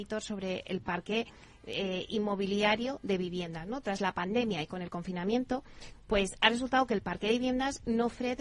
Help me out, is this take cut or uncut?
uncut